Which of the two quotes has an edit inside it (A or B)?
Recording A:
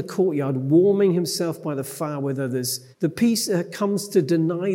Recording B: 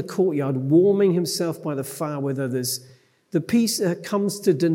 A